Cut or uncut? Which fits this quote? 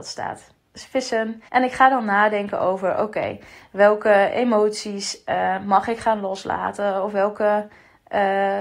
cut